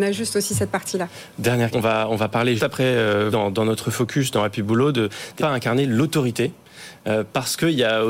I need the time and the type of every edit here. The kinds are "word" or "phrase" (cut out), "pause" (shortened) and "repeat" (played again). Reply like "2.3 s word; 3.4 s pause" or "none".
1.7 s word; 2.6 s word; 3.3 s word; 5.4 s phrase